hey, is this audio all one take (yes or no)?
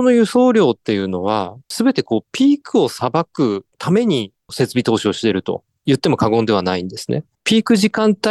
no